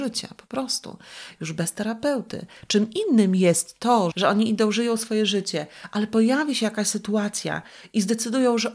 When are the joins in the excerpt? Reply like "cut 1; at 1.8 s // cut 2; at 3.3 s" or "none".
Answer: cut 1; at 4.1 s

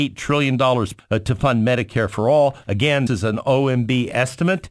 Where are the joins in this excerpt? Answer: cut 1; at 1.0 s // cut 2; at 3.1 s

